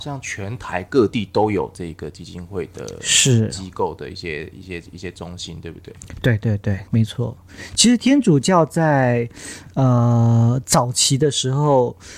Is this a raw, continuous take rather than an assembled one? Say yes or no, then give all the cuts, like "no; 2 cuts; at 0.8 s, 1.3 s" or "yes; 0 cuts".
no; 1 cut; at 6.9 s